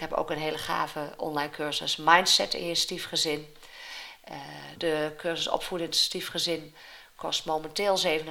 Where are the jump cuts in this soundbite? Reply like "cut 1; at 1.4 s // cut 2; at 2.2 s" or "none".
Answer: cut 1; at 4.8 s